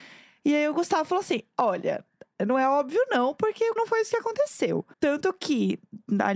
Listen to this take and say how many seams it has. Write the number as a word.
two